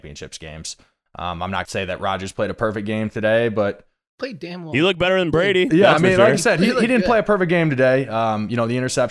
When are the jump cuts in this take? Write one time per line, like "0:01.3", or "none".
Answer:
0:01.6
0:04.1